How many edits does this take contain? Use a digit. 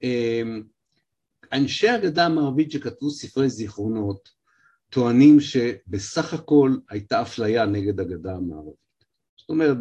0